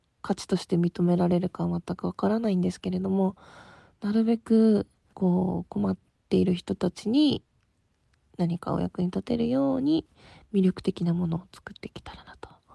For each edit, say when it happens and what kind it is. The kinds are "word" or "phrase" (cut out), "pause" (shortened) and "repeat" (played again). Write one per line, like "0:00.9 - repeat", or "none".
0:05.1 - word